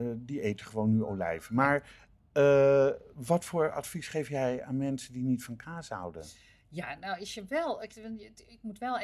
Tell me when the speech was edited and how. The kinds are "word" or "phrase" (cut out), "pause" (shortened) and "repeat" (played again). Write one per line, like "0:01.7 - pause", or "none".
none